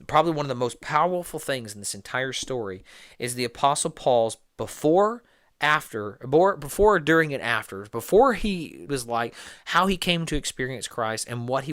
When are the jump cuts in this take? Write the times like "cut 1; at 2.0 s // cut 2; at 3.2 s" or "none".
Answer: cut 1; at 8.9 s

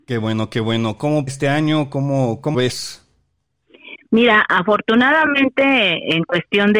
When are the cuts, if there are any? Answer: cut 1; at 1.3 s // cut 2; at 2.5 s

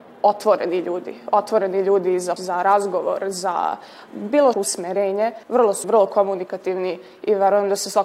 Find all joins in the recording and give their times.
cut 1; at 2.4 s // cut 2; at 4.5 s // cut 3; at 5.4 s // cut 4; at 5.8 s

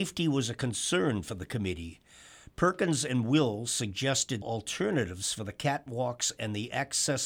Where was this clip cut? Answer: cut 1; at 4.4 s

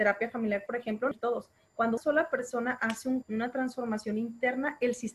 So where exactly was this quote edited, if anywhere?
cut 1; at 1.1 s // cut 2; at 2.0 s // cut 3; at 3.2 s

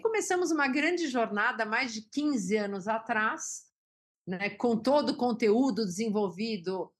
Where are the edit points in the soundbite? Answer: none

